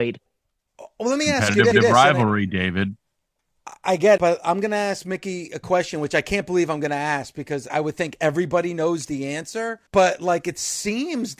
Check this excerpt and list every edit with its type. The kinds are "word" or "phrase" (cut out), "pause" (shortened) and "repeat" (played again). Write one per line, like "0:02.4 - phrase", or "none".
0:01.7 - repeat
0:04.2 - word
0:07.7 - word
0:09.9 - pause